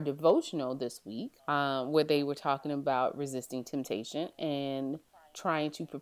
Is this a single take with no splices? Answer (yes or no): no